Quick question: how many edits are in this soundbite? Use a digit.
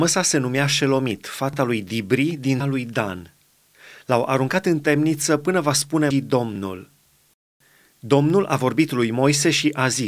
2